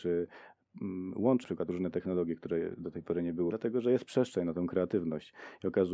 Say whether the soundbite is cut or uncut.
cut